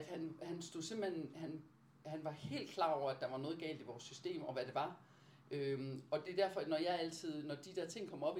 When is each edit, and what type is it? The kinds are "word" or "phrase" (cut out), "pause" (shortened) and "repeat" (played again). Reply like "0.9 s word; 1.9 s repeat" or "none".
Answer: none